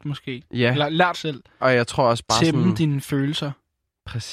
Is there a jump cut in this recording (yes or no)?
yes